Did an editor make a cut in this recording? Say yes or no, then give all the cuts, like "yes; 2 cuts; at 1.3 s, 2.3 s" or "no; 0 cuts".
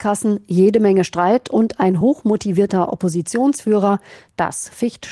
no; 0 cuts